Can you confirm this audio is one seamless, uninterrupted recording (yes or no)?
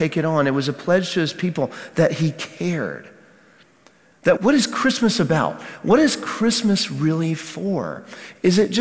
no